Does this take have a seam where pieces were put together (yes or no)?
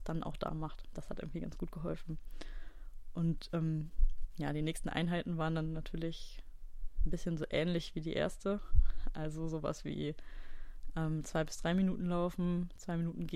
no